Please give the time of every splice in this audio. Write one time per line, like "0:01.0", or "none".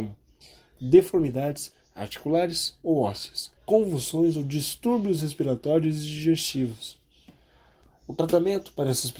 0:03.6